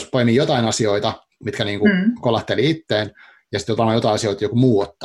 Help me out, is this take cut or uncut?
uncut